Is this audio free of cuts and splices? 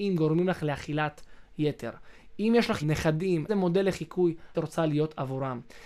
no; 3 cuts; at 2.8 s, 3.5 s, 4.5 s

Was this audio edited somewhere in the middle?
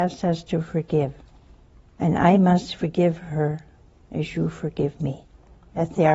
no; 0 cuts

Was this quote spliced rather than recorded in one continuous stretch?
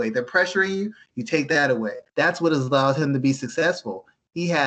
yes; 1 cut; at 2.1 s

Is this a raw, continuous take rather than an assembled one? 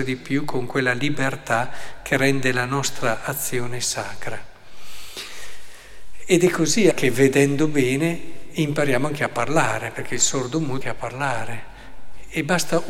no; 2 cuts; at 6.9 s, 10.8 s

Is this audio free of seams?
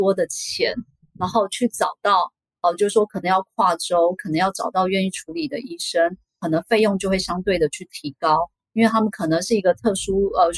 yes; 0 cuts

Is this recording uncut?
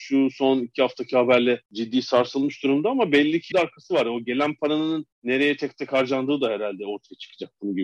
no; 3 cuts; at 1.7 s, 3.5 s, 5.1 s

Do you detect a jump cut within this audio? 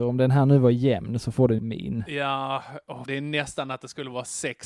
yes; 2 cuts; at 1.6 s, 3.1 s

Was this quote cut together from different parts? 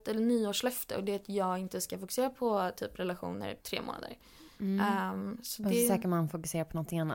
yes; 1 cut; at 3.6 s

